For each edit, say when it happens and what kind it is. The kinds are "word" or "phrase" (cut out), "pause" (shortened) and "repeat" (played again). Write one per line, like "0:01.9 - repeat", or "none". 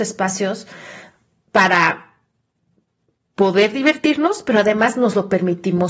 none

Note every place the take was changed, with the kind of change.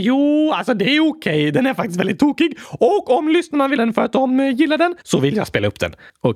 0:03.8 - word
0:05.0 - pause

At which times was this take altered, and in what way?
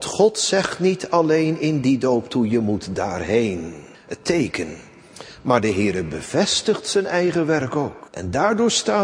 0:03.9 - pause
0:08.1 - pause

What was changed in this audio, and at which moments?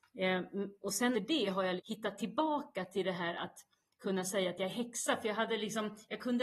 0:01.1 - word
0:01.8 - word

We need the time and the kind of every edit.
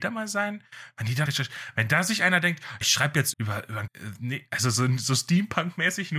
0:01.3 - word
0:02.8 - word
0:03.3 - word
0:03.9 - word

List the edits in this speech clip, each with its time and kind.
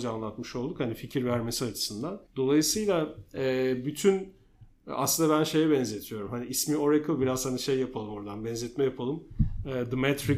0:02.3 - pause

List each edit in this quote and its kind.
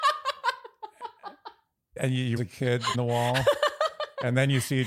0:02.0 - word
0:02.4 - word
0:02.9 - word

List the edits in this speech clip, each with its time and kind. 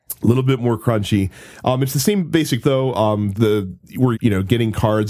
0:02.6 - word
0:03.3 - word
0:04.1 - word

